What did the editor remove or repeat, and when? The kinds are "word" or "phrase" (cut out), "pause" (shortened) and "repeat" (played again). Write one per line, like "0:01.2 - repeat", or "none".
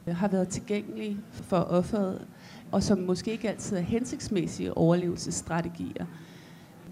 none